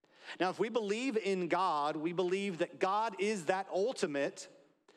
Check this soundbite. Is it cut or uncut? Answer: uncut